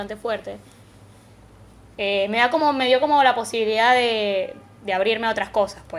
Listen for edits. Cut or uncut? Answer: uncut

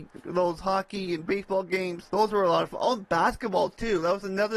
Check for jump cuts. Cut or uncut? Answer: uncut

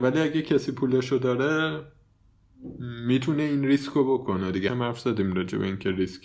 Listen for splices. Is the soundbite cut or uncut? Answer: cut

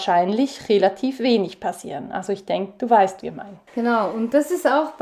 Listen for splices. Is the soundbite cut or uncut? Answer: cut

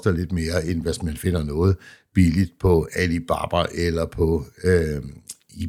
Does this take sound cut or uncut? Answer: uncut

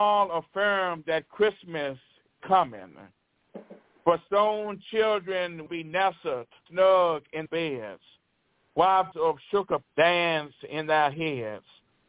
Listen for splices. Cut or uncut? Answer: cut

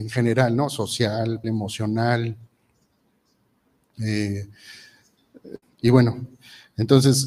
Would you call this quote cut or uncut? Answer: cut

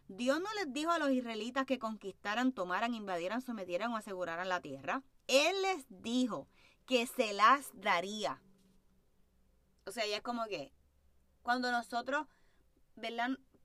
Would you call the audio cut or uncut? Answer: uncut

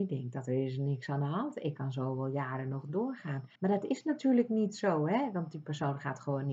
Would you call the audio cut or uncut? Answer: cut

